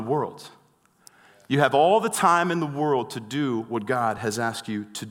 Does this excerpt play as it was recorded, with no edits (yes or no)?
yes